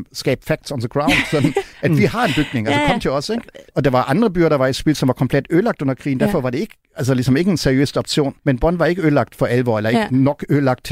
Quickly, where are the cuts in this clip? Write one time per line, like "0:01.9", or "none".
0:03.7
0:08.4